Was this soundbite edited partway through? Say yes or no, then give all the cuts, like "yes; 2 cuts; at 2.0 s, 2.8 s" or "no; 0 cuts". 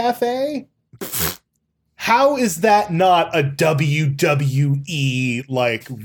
no; 0 cuts